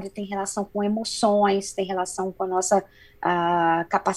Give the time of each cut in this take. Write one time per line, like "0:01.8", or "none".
none